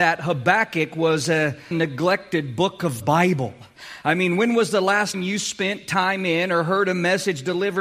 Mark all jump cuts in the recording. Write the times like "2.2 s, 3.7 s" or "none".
1.7 s, 3.0 s, 5.1 s